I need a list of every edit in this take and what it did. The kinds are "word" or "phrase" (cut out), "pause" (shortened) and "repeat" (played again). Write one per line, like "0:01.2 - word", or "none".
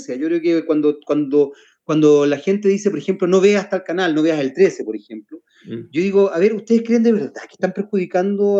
none